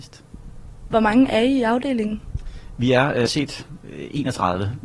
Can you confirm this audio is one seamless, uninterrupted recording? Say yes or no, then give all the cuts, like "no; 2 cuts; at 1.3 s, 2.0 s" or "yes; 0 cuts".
no; 1 cut; at 3.3 s